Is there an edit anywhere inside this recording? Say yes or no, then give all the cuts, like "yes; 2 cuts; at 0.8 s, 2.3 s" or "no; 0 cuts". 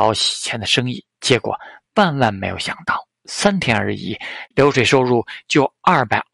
yes; 1 cut; at 4.5 s